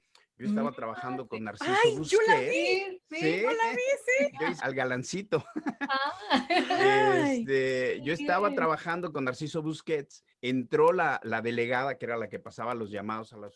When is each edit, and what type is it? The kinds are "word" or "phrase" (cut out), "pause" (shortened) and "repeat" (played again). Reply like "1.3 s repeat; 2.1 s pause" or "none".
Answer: 4.6 s word; 10.3 s pause